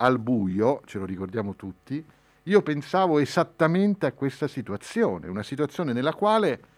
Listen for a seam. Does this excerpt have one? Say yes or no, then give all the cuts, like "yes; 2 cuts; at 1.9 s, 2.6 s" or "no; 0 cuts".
no; 0 cuts